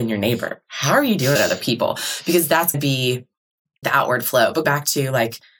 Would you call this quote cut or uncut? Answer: cut